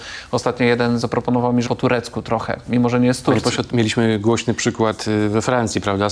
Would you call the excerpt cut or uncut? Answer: cut